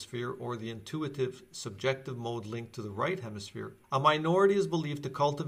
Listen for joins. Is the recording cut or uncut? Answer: cut